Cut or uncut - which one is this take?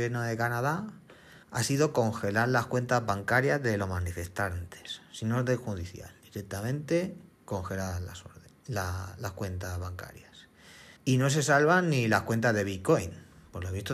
cut